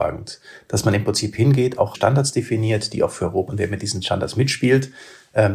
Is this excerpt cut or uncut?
cut